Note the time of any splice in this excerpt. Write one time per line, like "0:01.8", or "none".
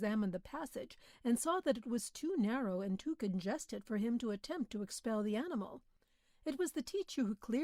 none